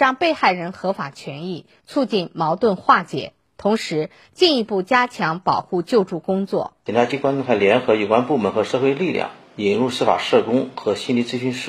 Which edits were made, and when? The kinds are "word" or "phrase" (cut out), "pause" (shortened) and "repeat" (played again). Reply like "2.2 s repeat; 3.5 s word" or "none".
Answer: none